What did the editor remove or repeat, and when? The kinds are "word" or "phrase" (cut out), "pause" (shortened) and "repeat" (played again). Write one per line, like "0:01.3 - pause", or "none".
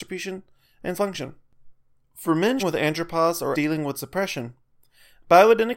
0:00.9 - word
0:02.6 - word
0:03.5 - word
0:03.9 - word